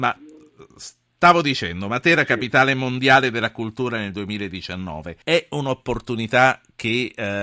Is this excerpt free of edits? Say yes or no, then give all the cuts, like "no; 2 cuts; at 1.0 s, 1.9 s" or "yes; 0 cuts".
no; 1 cut; at 5.2 s